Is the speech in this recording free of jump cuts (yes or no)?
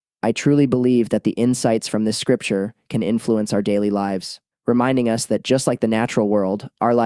no